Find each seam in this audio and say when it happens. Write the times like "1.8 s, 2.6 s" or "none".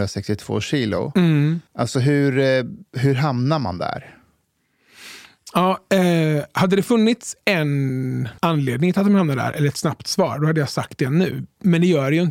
1.7 s, 2.9 s, 8.4 s

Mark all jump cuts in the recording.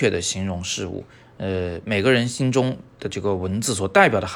none

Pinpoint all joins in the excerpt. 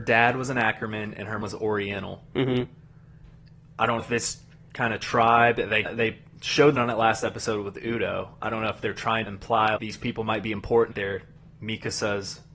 1.4 s, 4.0 s, 5.9 s, 6.8 s, 9.3 s, 9.8 s, 10.9 s

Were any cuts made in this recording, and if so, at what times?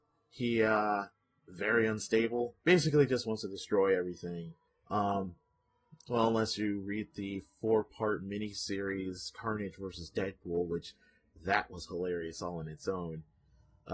2.6 s, 4.7 s

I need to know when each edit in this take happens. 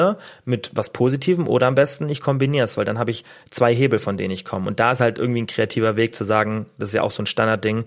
none

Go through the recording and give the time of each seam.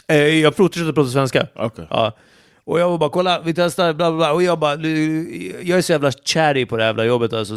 none

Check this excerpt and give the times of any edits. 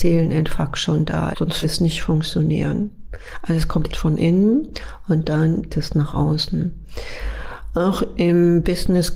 1.3 s, 1.6 s, 3.9 s, 5.7 s

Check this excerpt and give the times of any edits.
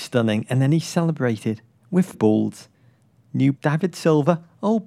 2.1 s, 3.6 s

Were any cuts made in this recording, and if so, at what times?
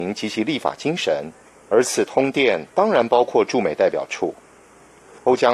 none

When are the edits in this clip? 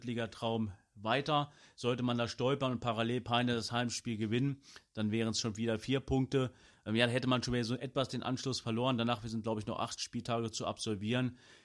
none

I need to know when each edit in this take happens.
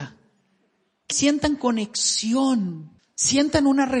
1.1 s, 3.0 s

